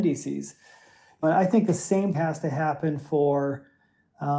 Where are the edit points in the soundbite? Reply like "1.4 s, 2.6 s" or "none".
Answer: 1.2 s, 2.1 s